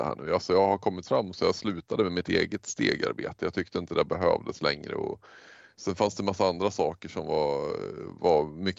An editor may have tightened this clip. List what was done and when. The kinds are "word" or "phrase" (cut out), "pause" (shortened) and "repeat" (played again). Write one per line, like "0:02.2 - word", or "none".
none